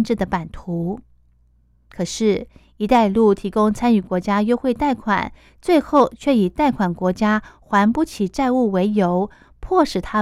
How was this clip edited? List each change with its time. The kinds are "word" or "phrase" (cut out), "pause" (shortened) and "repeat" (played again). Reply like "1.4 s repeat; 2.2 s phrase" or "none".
none